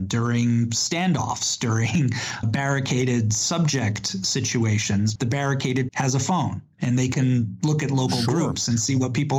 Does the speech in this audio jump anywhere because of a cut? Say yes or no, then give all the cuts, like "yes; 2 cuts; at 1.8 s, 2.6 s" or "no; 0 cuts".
yes; 3 cuts; at 2.4 s, 5.2 s, 5.9 s